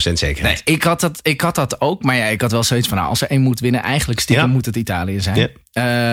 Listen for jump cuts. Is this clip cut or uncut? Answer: uncut